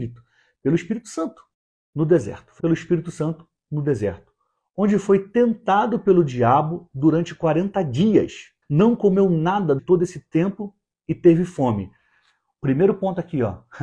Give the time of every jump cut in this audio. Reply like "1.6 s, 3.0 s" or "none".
1.5 s, 2.6 s, 8.6 s, 9.8 s